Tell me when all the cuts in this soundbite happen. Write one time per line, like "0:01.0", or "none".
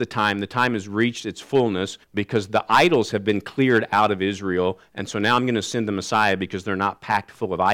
0:02.0